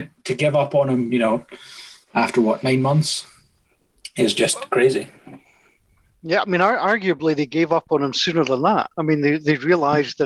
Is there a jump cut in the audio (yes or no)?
no